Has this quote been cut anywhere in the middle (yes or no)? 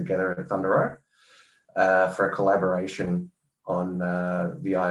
no